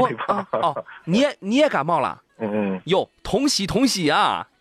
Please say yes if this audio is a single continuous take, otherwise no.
no